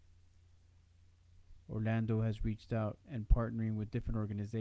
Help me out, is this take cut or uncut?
cut